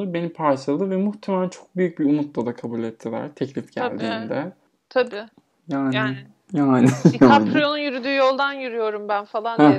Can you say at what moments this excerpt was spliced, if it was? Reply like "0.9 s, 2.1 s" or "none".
none